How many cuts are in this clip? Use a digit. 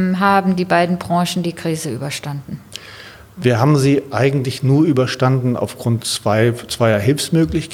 0